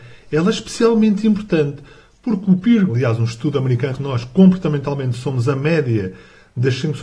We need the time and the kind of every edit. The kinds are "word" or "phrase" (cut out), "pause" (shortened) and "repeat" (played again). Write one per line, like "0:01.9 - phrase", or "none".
0:02.9 - word
0:03.9 - word